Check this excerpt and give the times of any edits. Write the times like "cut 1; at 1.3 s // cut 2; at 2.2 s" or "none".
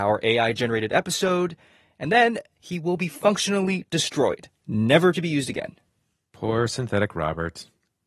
none